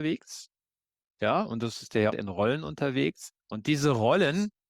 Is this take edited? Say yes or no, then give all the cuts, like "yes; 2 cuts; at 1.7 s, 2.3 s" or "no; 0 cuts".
yes; 2 cuts; at 2.1 s, 3.4 s